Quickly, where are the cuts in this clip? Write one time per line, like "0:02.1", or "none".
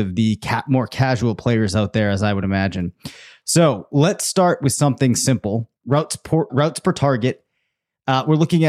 0:05.8
0:06.5